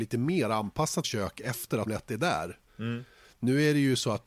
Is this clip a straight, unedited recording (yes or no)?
no